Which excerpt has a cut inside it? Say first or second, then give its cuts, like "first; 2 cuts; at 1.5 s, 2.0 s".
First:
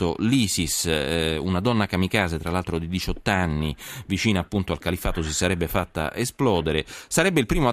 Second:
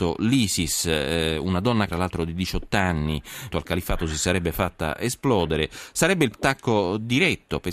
second; 3 cuts; at 1.9 s, 3.5 s, 6.3 s